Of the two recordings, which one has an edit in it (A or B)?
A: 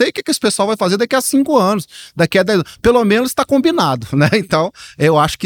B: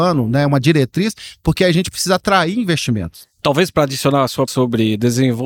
B